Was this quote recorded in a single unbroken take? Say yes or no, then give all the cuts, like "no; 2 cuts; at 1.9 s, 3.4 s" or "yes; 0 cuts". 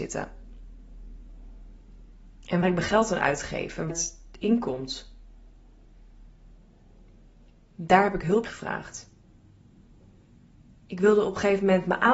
no; 3 cuts; at 2.6 s, 3.9 s, 8.4 s